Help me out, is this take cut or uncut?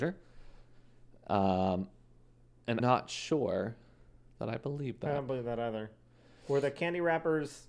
cut